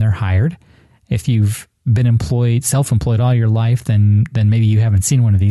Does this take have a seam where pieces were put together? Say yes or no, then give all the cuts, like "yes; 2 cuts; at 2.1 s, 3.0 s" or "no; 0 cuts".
no; 0 cuts